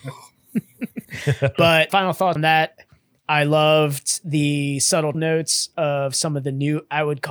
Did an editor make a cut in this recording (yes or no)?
yes